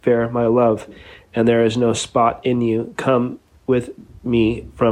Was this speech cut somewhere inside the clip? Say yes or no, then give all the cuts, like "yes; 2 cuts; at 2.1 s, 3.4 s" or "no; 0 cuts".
no; 0 cuts